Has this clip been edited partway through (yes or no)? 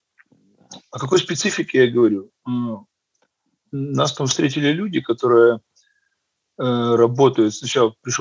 no